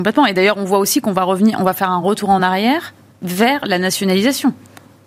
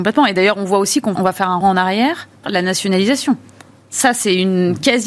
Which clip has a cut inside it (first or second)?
second